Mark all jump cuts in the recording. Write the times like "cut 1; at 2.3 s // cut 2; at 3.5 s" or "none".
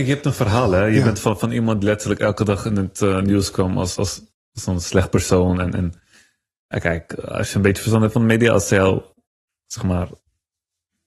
cut 1; at 1.8 s // cut 2; at 4.0 s